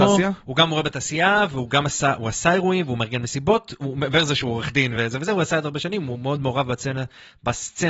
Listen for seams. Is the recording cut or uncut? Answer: uncut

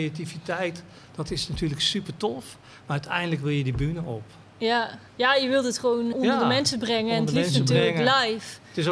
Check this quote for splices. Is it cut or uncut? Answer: cut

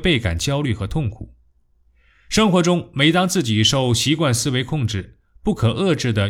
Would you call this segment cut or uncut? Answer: uncut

